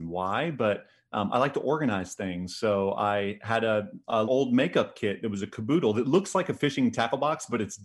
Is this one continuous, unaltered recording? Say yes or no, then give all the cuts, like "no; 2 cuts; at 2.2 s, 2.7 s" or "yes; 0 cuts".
no; 1 cut; at 4.3 s